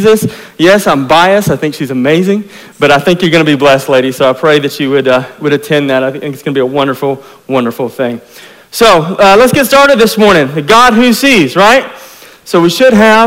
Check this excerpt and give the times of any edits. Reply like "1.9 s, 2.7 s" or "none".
none